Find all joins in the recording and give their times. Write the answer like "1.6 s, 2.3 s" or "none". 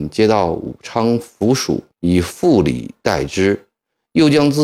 1.9 s